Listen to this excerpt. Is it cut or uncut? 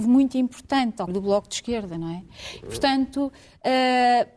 cut